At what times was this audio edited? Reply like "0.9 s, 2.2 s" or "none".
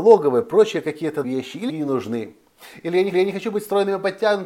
1.2 s, 1.7 s, 3.1 s